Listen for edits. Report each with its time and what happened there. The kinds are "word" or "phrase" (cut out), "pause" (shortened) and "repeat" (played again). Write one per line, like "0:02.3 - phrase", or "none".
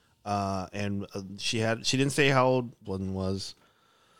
0:02.8 - word